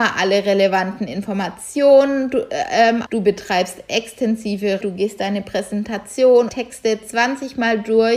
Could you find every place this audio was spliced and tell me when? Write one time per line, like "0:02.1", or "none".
0:03.1
0:04.8
0:06.5